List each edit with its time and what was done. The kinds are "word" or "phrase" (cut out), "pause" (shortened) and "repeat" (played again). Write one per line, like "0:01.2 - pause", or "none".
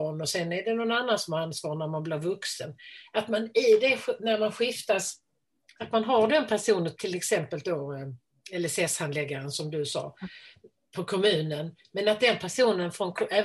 none